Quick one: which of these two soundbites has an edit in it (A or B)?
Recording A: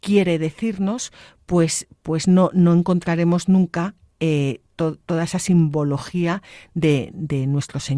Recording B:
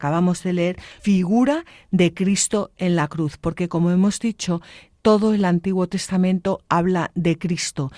B